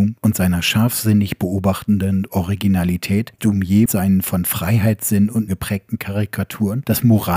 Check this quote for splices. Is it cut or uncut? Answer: cut